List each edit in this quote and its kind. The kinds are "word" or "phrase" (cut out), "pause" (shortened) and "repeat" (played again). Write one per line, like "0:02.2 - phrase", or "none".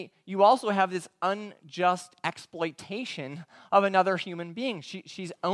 none